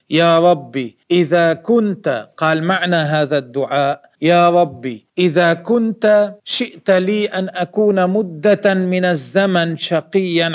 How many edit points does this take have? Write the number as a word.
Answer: four